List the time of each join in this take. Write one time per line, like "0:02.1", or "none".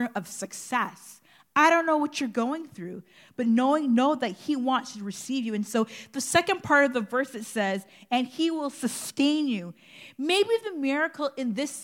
none